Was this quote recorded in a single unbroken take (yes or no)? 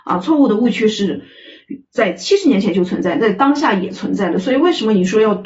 no